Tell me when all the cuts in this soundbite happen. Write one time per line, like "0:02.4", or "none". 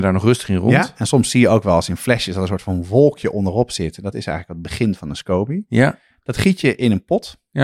none